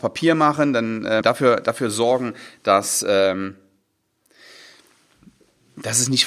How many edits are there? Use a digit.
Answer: 1